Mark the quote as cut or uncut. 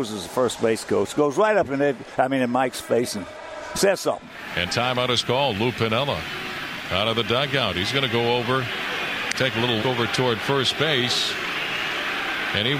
cut